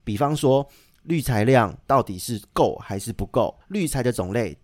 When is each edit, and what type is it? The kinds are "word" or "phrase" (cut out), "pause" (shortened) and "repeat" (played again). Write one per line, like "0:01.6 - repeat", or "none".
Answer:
0:03.6 - pause